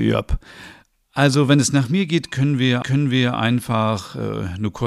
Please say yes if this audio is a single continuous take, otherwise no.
no